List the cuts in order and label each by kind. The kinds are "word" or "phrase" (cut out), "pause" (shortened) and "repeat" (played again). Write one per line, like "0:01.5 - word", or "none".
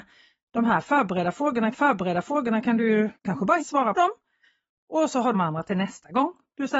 0:01.7 - repeat
0:03.1 - pause
0:03.6 - word
0:03.9 - phrase
0:05.3 - phrase